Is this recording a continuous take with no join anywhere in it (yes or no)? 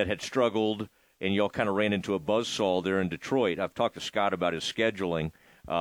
yes